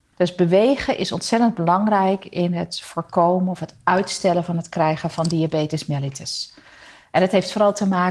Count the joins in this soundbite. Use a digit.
0